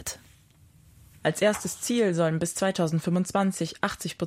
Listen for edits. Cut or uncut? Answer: uncut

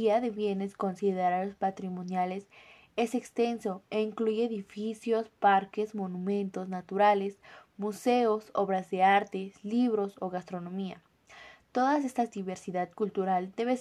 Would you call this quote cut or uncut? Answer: uncut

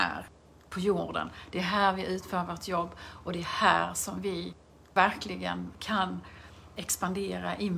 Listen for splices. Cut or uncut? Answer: uncut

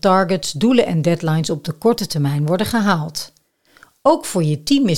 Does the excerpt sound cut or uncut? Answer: uncut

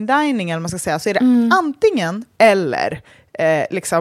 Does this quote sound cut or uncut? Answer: cut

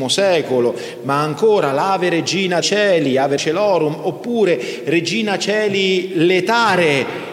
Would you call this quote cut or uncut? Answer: cut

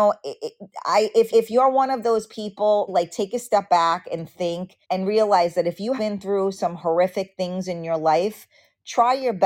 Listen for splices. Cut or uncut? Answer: cut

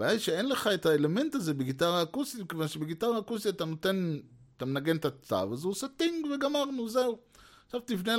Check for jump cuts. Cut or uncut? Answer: uncut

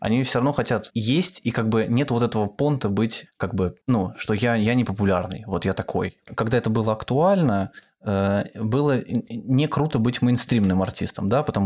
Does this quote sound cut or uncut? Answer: cut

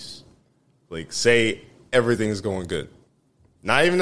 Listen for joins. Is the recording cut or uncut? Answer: uncut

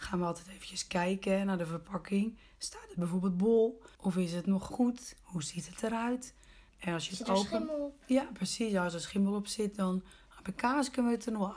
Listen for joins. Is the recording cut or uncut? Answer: cut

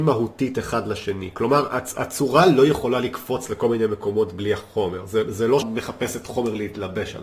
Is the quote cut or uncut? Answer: cut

